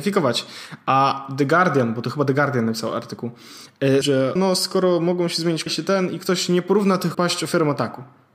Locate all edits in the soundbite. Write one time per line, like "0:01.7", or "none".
0:04.0
0:04.4
0:05.7
0:07.1